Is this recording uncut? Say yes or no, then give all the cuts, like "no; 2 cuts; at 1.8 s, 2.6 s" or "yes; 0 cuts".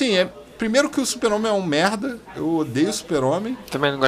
yes; 0 cuts